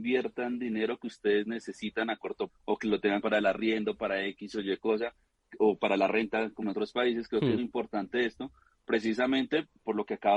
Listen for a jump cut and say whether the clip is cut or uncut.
cut